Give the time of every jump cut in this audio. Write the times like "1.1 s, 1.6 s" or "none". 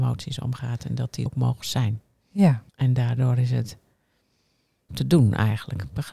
1.3 s, 2.7 s, 4.9 s